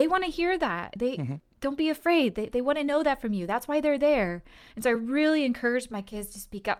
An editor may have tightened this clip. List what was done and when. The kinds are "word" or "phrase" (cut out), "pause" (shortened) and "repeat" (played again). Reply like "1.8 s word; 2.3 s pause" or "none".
none